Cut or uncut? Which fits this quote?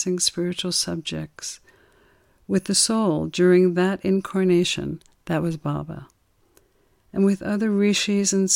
uncut